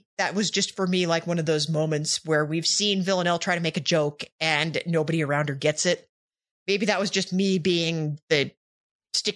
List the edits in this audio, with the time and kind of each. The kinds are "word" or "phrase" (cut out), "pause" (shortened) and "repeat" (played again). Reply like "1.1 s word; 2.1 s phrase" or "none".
none